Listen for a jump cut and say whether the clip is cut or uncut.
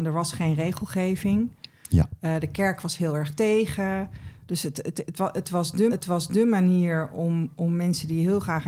cut